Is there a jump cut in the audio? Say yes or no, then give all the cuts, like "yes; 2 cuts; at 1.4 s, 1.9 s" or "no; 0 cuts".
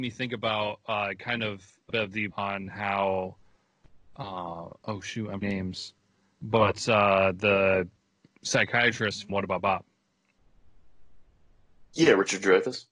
yes; 4 cuts; at 1.9 s, 2.3 s, 5.4 s, 9.3 s